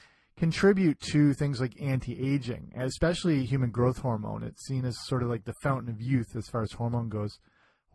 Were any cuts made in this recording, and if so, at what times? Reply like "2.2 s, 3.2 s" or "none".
none